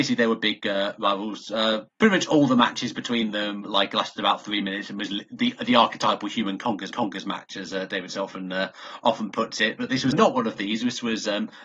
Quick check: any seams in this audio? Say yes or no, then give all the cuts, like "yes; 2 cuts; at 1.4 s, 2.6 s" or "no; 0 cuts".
yes; 3 cuts; at 1.9 s, 6.9 s, 10.1 s